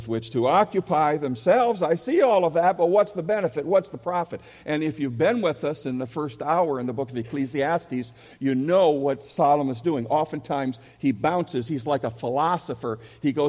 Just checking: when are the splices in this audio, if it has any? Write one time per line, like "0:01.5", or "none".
none

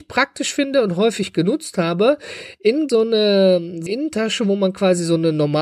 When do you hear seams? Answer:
0:02.9
0:03.9

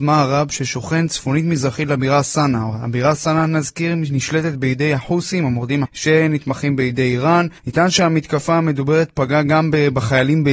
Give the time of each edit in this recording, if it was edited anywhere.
0:05.8
0:07.6

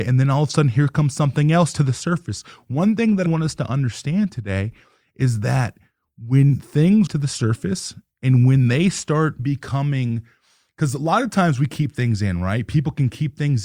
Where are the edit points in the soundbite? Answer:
0:03.3
0:07.1
0:09.4

